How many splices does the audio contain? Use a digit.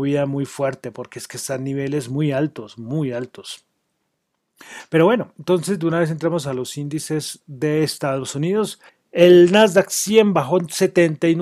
1